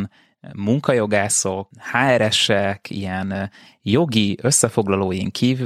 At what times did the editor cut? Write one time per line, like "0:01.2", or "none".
none